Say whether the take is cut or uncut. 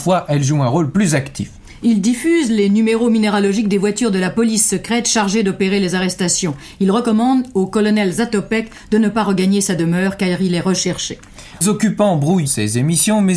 cut